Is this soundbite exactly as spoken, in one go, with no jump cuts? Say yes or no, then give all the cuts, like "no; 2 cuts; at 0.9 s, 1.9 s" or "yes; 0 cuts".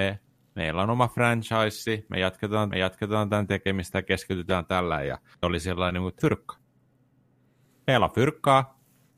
no; 3 cuts; at 2.7 s, 5.4 s, 6.2 s